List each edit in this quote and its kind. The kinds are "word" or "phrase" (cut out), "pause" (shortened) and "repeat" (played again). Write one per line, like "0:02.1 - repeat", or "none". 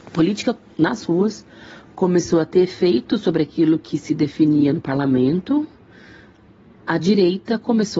none